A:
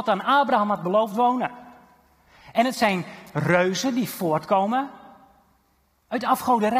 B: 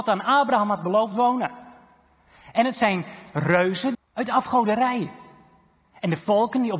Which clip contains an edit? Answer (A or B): B